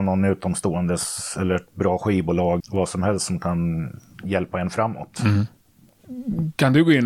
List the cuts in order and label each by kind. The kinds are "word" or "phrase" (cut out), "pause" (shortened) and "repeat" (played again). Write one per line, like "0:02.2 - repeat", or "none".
0:02.6 - word